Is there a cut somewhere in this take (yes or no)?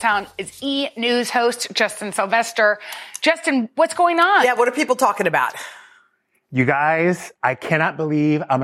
no